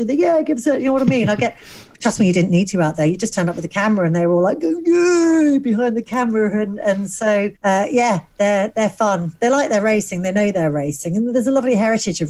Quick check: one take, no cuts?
no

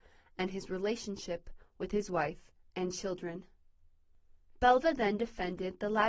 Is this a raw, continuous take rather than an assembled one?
yes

